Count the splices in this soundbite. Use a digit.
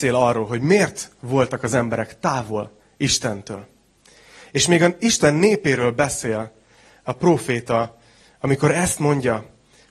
0